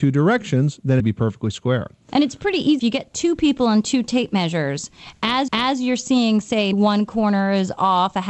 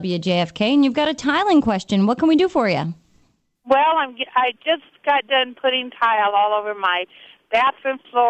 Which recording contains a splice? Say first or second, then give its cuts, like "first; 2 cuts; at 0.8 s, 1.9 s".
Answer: first; 4 cuts; at 1.0 s, 2.8 s, 5.5 s, 6.7 s